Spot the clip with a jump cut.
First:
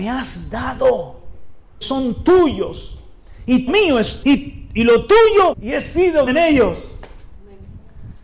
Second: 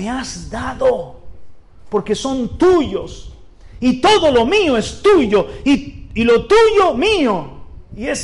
first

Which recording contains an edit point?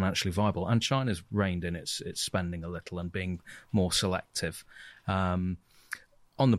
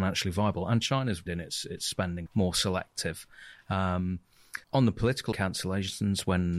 second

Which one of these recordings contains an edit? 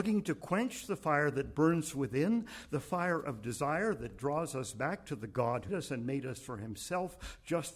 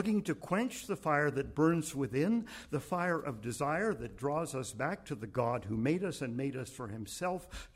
first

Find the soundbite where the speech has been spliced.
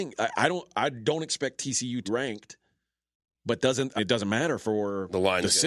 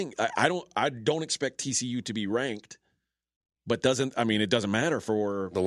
first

